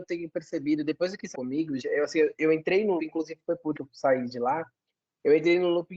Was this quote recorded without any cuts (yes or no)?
no